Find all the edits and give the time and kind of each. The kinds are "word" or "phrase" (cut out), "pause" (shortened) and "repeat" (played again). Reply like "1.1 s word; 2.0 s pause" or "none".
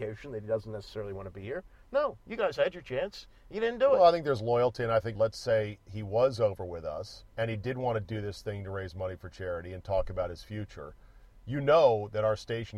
5.1 s word; 7.3 s pause

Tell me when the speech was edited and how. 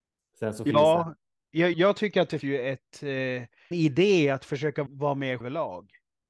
1.7 s word; 2.4 s word; 3.7 s word; 4.9 s word; 5.4 s word

